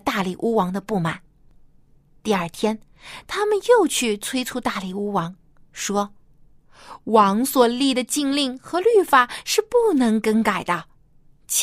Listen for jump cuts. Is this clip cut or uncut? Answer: uncut